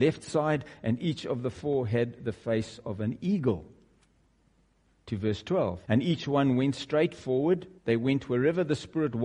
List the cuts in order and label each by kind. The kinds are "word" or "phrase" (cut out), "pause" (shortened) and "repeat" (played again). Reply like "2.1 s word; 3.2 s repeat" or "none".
5.8 s pause; 7.8 s pause